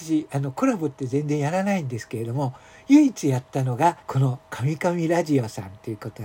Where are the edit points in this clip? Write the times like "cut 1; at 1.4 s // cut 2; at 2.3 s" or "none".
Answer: cut 1; at 4.0 s